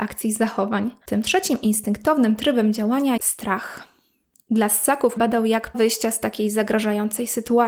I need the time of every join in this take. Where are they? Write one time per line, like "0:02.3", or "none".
0:01.0
0:03.2
0:05.2
0:05.7